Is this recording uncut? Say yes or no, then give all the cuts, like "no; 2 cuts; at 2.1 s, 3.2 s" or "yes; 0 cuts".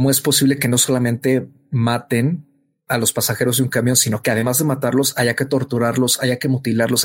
yes; 0 cuts